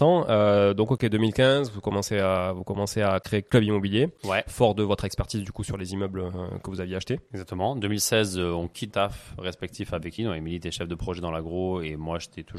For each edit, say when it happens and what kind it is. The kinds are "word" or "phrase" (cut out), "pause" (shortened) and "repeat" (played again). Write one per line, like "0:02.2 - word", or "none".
0:08.9 - word
0:10.2 - word